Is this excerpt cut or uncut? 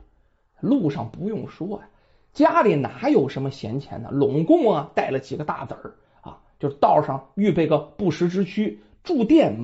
uncut